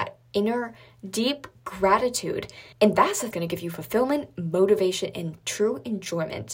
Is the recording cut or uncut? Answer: cut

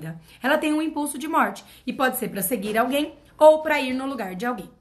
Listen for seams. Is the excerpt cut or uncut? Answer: uncut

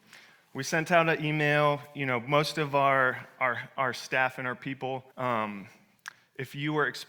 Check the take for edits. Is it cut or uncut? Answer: cut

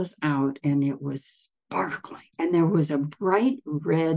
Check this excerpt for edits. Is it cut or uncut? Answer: cut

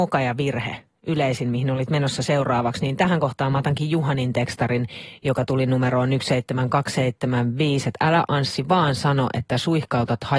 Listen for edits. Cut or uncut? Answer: uncut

